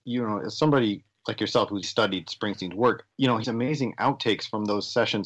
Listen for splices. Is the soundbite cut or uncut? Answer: cut